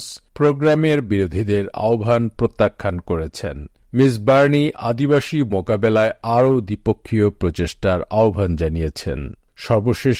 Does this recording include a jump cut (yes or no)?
yes